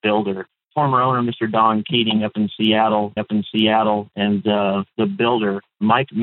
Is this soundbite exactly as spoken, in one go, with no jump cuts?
no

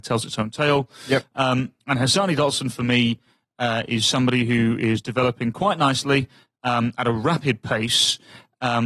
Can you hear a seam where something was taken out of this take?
no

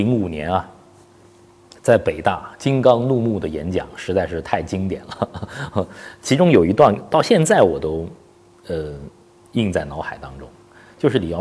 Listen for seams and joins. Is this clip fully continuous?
yes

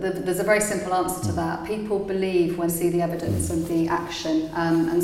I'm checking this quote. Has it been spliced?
yes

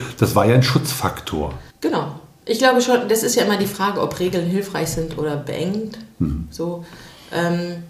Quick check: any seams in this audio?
yes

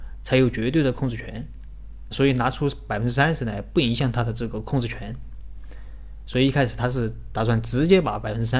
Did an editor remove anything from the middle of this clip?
yes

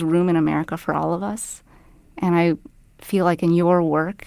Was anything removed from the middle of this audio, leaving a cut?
no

